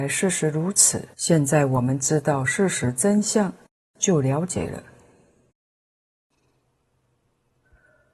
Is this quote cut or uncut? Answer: cut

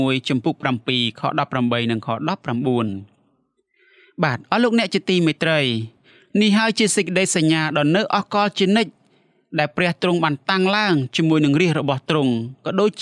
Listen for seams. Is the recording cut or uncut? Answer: uncut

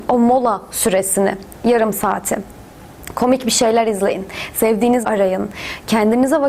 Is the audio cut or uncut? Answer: cut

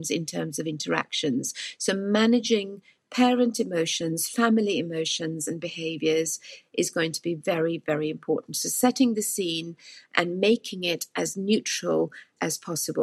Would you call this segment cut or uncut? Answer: uncut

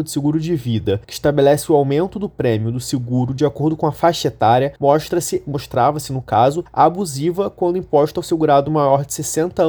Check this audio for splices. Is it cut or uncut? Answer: cut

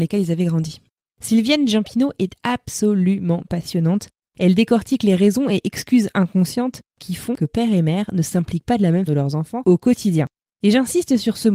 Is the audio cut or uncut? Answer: cut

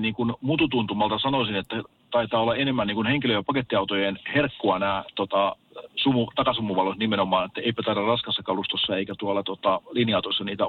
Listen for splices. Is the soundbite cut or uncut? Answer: uncut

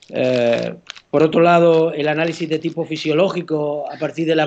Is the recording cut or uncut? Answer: uncut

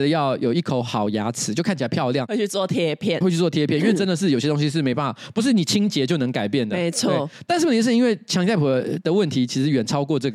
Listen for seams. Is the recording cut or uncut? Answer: cut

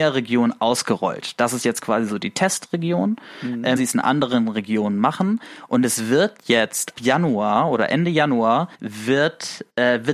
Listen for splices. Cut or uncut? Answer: cut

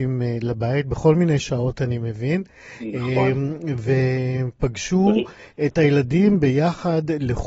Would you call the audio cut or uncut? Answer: uncut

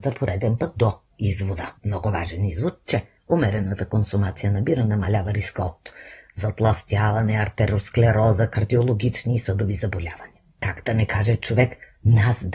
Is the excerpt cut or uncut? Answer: cut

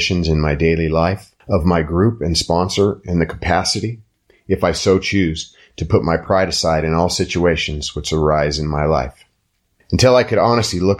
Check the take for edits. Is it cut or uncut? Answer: uncut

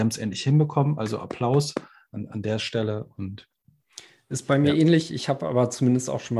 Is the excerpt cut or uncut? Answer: uncut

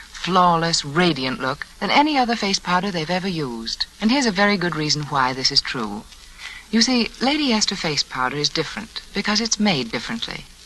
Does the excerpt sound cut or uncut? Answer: cut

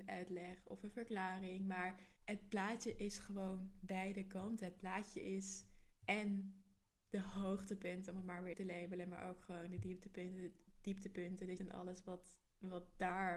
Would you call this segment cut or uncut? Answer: cut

